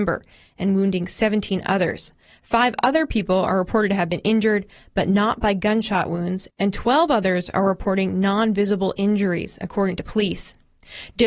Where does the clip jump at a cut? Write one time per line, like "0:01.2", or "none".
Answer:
none

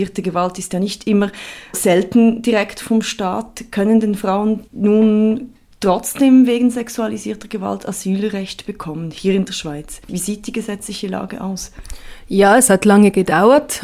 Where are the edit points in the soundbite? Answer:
0:01.7
0:04.7
0:10.0

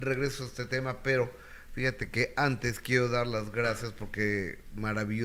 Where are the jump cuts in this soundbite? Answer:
none

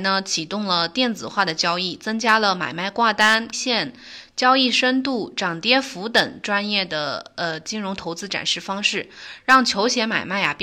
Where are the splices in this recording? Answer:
0:03.5

